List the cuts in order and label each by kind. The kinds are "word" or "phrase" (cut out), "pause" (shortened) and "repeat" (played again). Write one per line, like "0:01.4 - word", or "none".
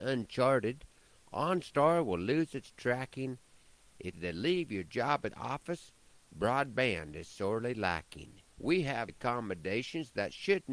0:04.1 - word
0:05.3 - word
0:08.5 - pause
0:09.1 - word